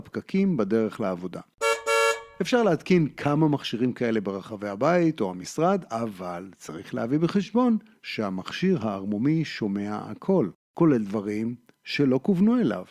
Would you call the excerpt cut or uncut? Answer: uncut